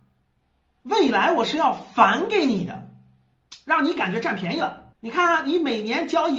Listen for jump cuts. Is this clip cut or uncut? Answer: cut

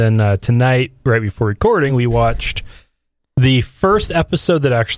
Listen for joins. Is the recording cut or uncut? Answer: uncut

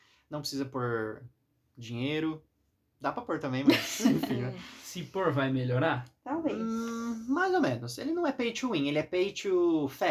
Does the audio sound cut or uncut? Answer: uncut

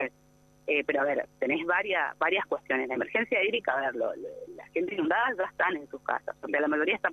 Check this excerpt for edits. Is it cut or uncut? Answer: uncut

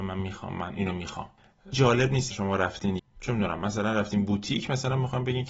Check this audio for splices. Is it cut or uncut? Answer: cut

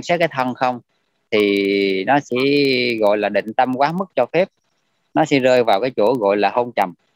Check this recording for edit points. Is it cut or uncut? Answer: uncut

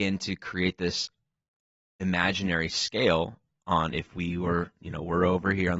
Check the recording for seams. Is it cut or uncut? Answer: uncut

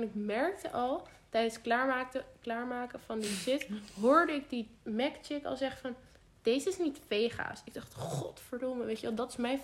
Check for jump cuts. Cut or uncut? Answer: uncut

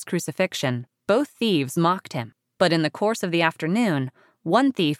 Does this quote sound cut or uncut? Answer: uncut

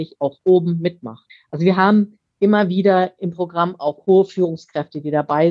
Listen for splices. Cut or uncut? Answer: cut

